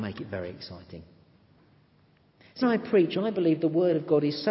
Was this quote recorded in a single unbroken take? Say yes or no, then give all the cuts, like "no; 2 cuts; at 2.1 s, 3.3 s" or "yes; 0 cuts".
no; 1 cut; at 2.6 s